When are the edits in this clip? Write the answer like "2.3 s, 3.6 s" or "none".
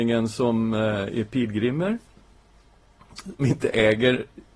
3.4 s

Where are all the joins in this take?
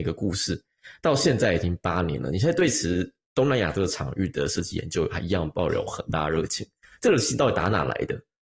none

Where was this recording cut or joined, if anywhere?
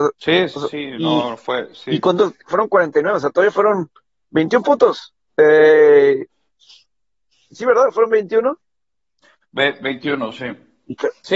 none

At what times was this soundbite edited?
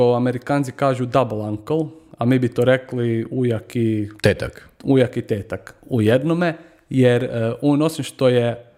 4.2 s

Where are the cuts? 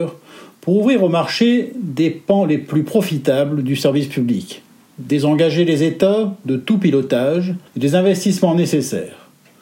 4.9 s, 7.7 s

